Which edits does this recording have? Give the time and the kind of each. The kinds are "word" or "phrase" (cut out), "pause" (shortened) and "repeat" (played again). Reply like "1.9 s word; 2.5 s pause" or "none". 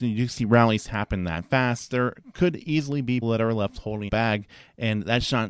3.2 s word; 4.1 s word